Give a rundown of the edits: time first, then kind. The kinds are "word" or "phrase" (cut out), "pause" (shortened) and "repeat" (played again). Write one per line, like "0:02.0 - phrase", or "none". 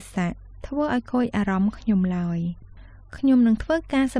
none